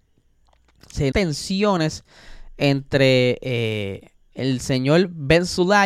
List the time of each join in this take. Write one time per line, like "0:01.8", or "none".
0:01.1